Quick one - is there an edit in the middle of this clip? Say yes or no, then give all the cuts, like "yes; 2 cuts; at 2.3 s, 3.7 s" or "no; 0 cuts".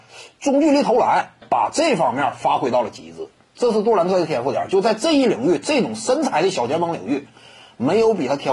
yes; 1 cut; at 1.4 s